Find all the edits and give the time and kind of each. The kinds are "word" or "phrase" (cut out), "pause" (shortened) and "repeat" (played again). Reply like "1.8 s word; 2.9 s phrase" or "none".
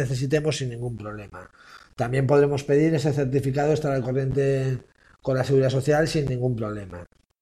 none